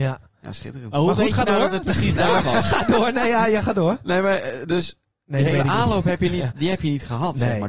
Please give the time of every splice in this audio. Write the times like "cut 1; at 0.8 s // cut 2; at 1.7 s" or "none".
none